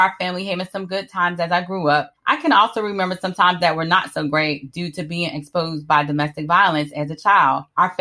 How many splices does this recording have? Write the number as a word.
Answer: one